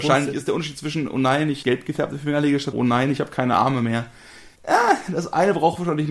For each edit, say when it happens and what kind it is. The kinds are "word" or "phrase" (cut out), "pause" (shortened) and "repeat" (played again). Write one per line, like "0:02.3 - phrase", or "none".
0:01.6 - phrase
0:02.7 - word
0:04.6 - pause